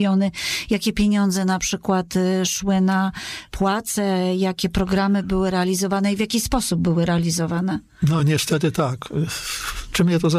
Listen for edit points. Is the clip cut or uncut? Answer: uncut